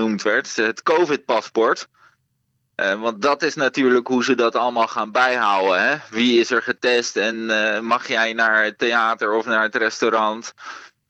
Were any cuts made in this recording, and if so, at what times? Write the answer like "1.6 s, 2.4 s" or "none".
none